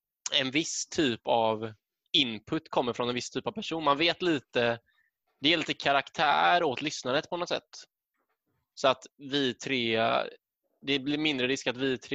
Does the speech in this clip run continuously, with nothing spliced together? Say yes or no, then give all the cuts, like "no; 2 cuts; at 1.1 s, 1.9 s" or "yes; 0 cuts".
yes; 0 cuts